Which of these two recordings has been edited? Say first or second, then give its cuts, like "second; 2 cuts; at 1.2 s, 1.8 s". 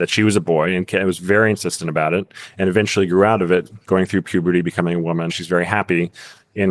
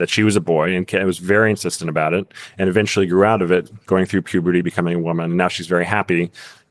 first; 1 cut; at 5.3 s